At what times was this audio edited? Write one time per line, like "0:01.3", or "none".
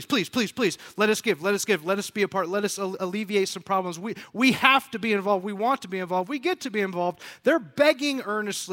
none